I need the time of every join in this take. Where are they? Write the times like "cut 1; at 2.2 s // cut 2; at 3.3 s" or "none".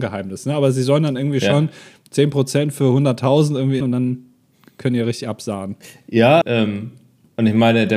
cut 1; at 3.8 s // cut 2; at 6.4 s